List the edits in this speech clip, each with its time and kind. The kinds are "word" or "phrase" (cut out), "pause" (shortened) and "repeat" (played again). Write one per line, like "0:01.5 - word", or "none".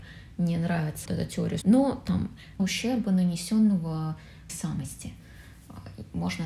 0:01.1 - word
0:01.6 - word
0:02.6 - word
0:04.5 - phrase